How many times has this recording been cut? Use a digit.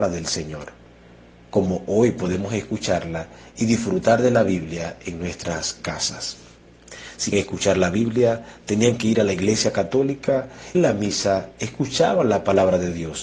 2